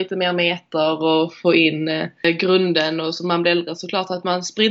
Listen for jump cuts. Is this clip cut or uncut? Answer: uncut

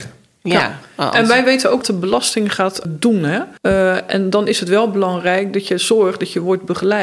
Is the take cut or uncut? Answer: cut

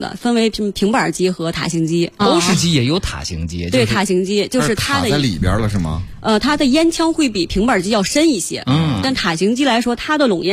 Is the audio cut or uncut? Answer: cut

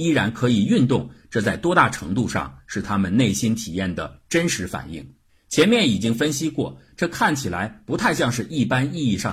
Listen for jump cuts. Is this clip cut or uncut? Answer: cut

